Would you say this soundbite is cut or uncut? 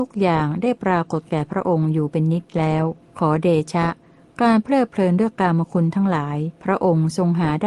cut